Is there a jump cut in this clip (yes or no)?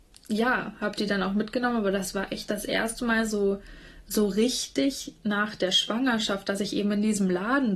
no